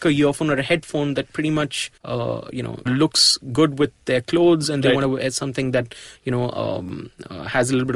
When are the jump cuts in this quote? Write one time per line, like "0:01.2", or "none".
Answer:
0:02.0
0:02.9